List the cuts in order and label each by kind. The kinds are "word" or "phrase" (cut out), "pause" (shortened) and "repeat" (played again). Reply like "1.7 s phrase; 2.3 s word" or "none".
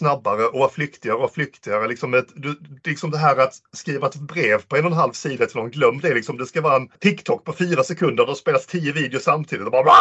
7.0 s pause